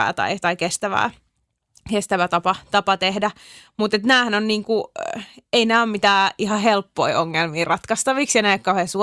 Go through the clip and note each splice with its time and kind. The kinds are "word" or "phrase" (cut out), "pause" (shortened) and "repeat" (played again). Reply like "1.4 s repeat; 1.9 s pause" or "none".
none